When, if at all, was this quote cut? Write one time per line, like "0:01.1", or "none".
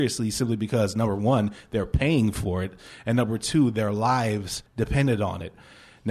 0:04.7